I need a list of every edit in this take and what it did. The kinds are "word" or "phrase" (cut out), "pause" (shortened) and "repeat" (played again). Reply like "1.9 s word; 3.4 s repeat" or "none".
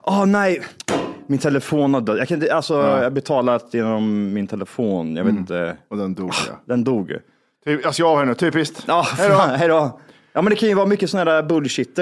none